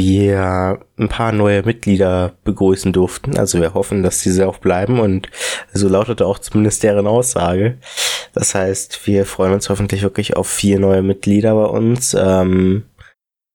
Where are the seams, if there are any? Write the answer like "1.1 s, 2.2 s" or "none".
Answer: none